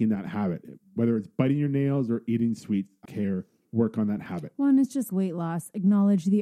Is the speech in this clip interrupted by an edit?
yes; 2 cuts; at 3.1 s, 5.1 s

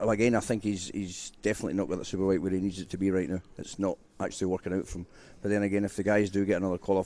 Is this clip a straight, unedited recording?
yes; 0 cuts

